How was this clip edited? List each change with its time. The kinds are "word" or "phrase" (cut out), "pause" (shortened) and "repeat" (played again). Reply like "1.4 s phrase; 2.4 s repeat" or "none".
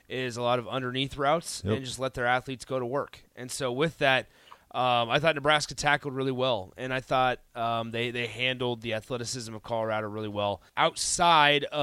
10.7 s pause